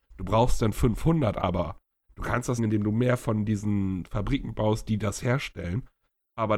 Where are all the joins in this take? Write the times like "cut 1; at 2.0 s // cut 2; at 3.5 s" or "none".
cut 1; at 2.6 s

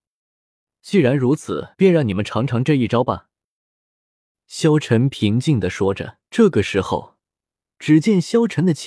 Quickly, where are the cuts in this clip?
cut 1; at 1.7 s // cut 2; at 6.2 s

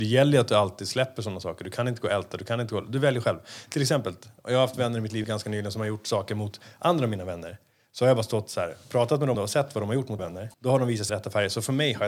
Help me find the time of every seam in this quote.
cut 1; at 5.2 s // cut 2; at 9.3 s // cut 3; at 10.2 s // cut 4; at 10.5 s // cut 5; at 11.1 s

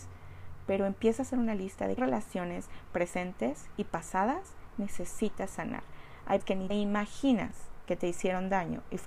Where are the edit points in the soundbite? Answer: cut 1; at 2.0 s // cut 2; at 6.4 s // cut 3; at 6.7 s

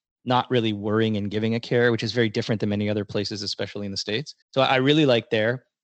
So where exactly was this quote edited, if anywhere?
cut 1; at 4.4 s

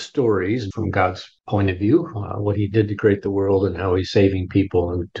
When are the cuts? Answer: none

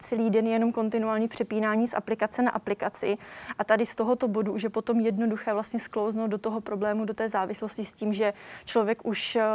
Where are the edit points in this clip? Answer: none

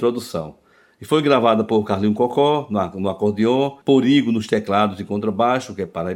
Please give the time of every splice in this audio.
cut 1; at 3.8 s

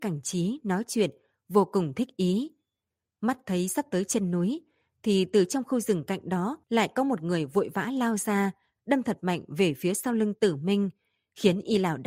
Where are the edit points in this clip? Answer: cut 1; at 6.6 s

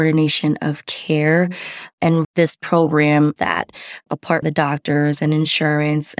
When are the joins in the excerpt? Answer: cut 1; at 2.2 s // cut 2; at 3.4 s // cut 3; at 4.4 s

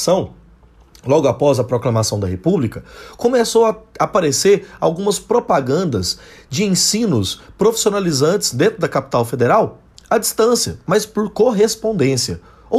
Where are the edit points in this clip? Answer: none

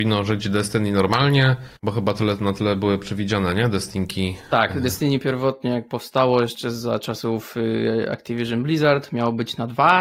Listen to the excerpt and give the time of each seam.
cut 1; at 1.8 s

